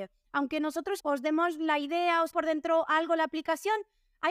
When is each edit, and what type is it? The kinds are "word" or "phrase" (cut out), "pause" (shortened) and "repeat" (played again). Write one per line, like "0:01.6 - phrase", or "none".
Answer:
0:01.0 - word
0:02.3 - word

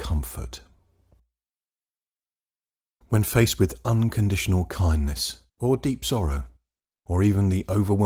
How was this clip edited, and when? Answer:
0:05.5 - pause

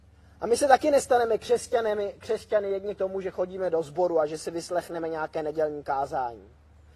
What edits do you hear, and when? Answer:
0:03.0 - word

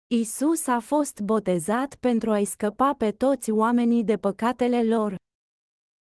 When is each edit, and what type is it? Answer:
none

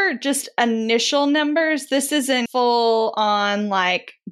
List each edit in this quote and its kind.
0:02.5 - word

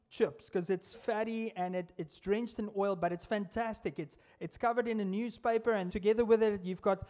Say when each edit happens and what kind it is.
0:00.9 - word
0:05.9 - word

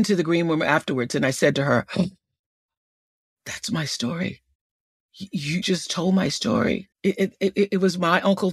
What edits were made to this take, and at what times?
0:05.6 - word
0:06.9 - pause

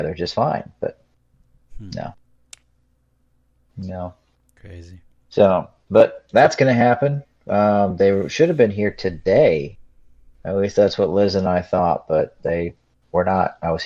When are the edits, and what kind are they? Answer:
0:12.4 - word

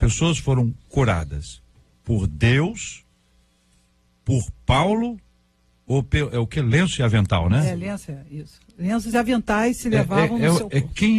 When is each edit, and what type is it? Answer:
none

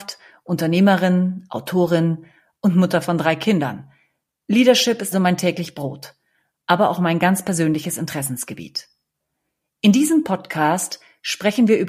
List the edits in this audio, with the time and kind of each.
0:05.1 - word

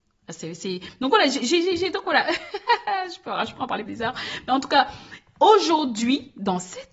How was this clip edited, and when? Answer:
0:03.9 - word

